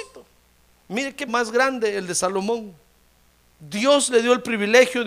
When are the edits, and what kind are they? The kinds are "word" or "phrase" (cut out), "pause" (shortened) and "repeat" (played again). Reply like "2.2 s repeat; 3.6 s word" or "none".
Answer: 1.3 s word; 3.3 s pause